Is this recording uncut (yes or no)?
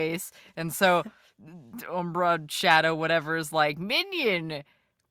yes